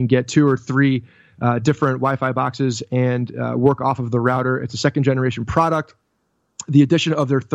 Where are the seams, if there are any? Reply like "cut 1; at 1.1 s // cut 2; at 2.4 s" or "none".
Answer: none